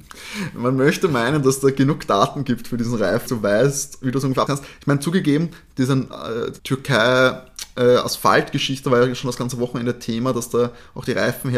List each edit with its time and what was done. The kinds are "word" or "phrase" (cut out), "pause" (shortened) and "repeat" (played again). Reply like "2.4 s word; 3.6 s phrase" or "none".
3.3 s word; 4.5 s word; 6.6 s pause